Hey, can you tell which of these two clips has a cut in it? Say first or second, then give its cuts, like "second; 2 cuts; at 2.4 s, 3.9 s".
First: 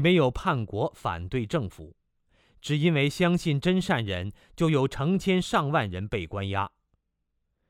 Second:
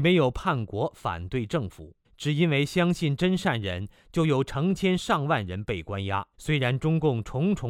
second; 2 cuts; at 2.0 s, 6.3 s